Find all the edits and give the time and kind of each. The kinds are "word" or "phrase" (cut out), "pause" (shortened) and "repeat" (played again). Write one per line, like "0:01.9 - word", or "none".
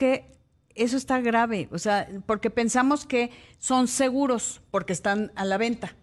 none